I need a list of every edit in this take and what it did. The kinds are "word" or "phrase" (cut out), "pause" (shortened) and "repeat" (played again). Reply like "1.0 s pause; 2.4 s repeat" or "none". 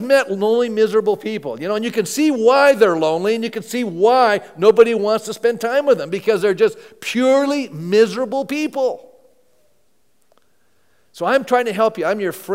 none

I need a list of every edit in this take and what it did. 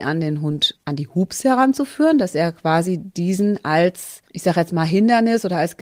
none

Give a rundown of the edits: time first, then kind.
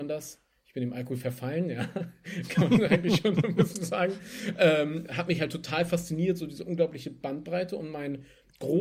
none

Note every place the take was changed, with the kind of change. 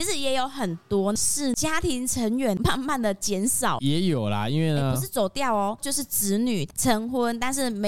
none

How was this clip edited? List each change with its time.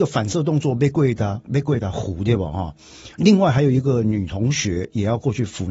3.1 s pause

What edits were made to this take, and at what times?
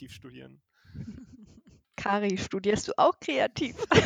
none

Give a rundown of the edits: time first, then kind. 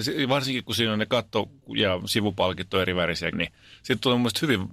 3.3 s word

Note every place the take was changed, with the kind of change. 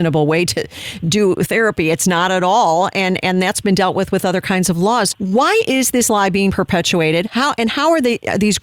5.1 s word

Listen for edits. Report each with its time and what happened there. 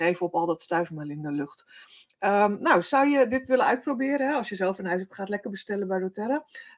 none

